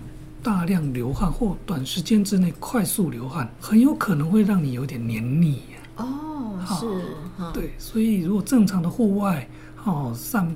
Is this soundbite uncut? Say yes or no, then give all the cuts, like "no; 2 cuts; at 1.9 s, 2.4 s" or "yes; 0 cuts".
no; 1 cut; at 3.6 s